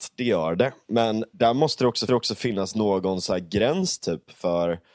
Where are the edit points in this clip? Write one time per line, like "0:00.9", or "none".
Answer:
0:01.3
0:02.1